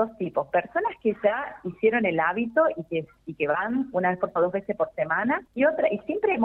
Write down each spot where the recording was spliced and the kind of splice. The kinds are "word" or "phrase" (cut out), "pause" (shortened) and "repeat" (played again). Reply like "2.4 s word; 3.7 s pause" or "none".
4.4 s word; 5.5 s pause